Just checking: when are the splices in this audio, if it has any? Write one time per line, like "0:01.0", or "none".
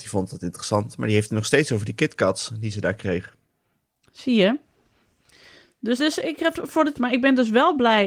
0:06.0
0:06.5
0:07.0